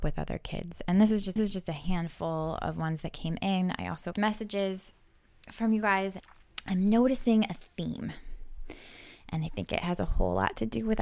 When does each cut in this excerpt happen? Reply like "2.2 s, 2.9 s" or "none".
1.4 s, 4.1 s